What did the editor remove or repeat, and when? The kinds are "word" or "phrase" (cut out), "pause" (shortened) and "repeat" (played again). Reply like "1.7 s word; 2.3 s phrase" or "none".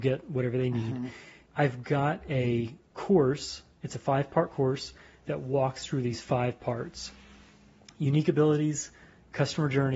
none